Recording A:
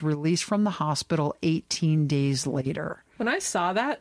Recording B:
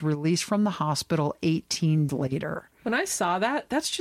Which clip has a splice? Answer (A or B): B